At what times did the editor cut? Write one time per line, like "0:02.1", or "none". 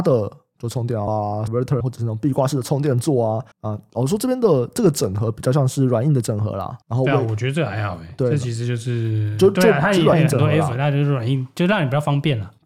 0:01.1
0:01.5
0:01.8
0:03.5
0:06.8